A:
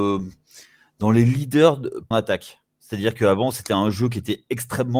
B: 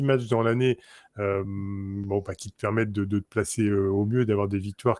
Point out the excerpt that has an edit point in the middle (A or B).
A